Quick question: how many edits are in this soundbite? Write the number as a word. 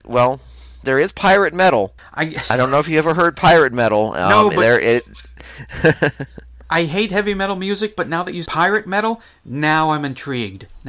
one